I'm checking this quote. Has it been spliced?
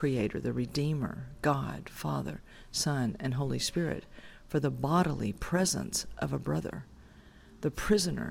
no; 0 cuts

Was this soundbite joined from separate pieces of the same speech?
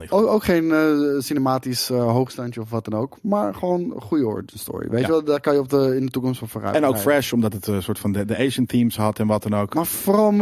no; 0 cuts

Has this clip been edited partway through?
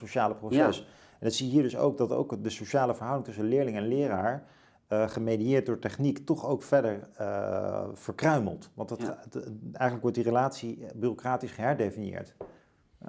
no; 0 cuts

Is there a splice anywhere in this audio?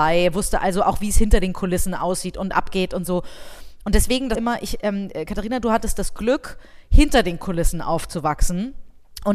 yes; 1 cut; at 4.3 s

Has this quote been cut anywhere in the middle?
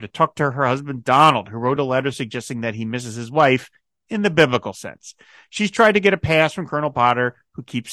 no; 0 cuts

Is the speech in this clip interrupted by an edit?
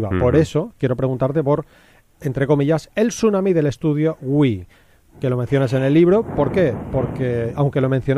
no; 0 cuts

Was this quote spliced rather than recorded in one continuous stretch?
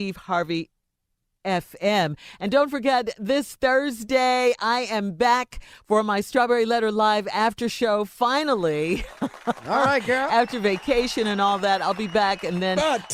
no; 0 cuts

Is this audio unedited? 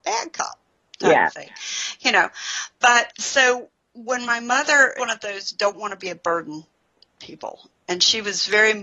no; 2 cuts; at 3.1 s, 5.0 s

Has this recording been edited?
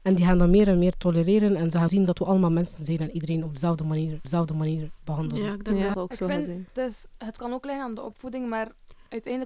yes; 3 cuts; at 1.9 s, 4.2 s, 5.9 s

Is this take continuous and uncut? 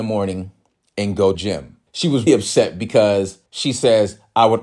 no; 4 cuts; at 1.3 s, 1.9 s, 2.3 s, 3.5 s

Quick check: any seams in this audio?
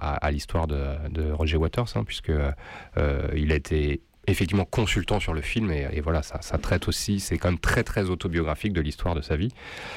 yes; 1 cut; at 5.9 s

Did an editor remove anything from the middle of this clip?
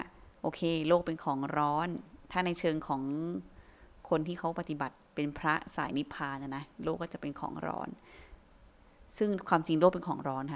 yes; 1 cut; at 5.1 s

